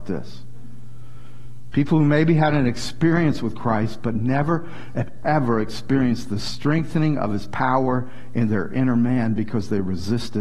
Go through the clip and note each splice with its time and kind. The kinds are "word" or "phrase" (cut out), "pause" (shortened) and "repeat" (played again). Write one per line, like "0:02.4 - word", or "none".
none

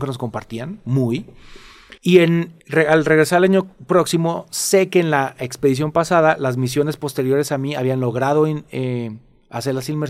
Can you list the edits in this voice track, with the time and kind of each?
0:02.0 - pause
0:02.6 - pause
0:03.7 - pause

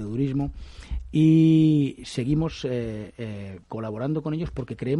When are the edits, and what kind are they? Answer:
0:03.6 - pause

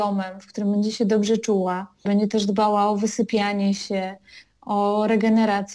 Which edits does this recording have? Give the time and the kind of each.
none

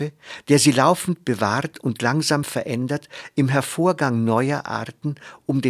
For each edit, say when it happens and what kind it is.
none

